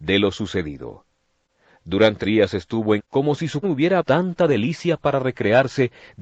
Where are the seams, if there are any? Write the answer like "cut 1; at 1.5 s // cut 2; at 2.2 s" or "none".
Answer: cut 1; at 2.2 s // cut 2; at 3.0 s // cut 3; at 3.6 s // cut 4; at 4.0 s